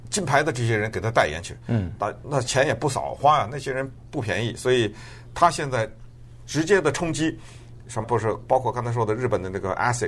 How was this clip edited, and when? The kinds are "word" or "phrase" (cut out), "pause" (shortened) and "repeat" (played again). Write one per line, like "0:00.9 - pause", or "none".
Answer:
0:08.0 - phrase